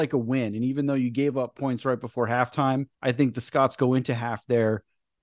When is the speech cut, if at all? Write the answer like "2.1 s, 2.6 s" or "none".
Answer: 2.9 s